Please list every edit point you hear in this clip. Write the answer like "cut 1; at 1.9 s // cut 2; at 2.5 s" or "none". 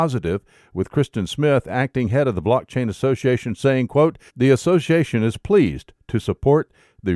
cut 1; at 4.3 s